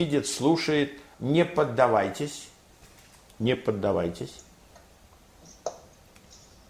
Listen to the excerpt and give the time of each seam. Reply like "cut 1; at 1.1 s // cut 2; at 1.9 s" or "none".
cut 1; at 1.1 s